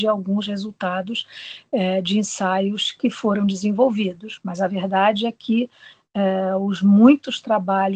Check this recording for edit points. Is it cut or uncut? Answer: uncut